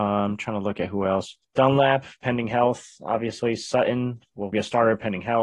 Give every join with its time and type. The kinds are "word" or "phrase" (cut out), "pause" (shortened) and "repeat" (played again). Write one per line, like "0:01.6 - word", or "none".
0:01.4 - pause
0:04.5 - word